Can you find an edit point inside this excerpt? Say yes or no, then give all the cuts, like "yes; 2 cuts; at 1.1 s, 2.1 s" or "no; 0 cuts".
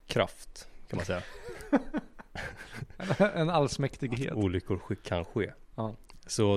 no; 0 cuts